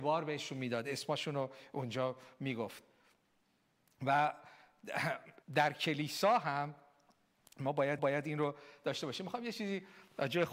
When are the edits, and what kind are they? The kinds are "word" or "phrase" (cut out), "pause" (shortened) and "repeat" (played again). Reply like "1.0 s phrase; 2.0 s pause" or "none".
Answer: 5.4 s pause; 8.0 s repeat